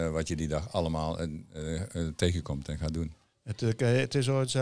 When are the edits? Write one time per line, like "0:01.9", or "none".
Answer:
none